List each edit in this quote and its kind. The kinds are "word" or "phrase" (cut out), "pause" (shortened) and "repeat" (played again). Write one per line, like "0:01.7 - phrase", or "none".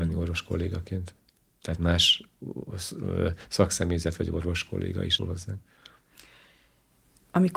0:01.4 - pause
0:05.2 - word